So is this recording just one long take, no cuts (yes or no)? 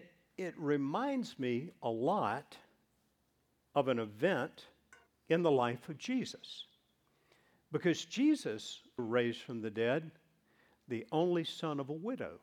no